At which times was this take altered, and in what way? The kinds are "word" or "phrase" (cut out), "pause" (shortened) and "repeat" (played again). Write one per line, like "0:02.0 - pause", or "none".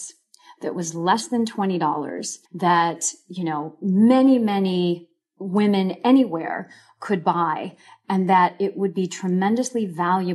0:02.5 - pause